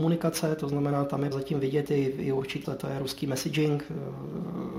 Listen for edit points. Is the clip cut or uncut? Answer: cut